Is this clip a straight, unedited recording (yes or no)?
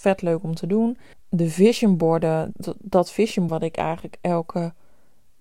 no